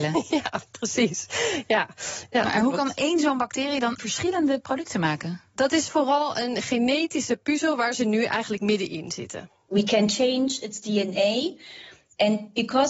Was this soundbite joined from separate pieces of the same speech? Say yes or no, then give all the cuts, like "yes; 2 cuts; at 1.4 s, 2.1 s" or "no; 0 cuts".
yes; 1 cut; at 4.0 s